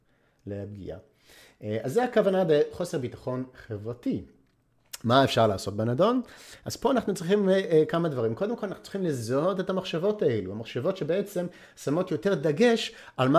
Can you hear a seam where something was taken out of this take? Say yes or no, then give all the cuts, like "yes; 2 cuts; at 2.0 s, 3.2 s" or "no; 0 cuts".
no; 0 cuts